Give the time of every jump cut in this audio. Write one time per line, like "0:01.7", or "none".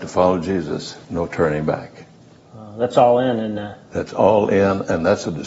0:01.0